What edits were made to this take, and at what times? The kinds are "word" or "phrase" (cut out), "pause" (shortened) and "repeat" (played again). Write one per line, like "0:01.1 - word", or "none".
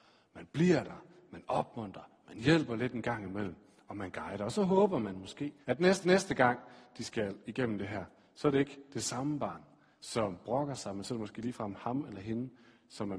0:05.6 - pause
0:06.0 - repeat